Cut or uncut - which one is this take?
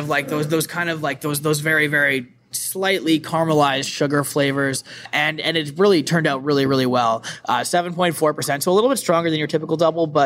uncut